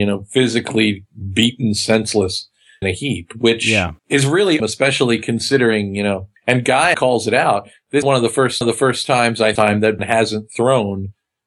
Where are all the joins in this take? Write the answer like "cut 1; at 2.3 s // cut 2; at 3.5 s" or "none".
cut 1; at 2.8 s // cut 2; at 4.0 s // cut 3; at 4.6 s // cut 4; at 6.4 s // cut 5; at 6.9 s // cut 6; at 8.0 s // cut 7; at 8.6 s // cut 8; at 9.5 s // cut 9; at 10.0 s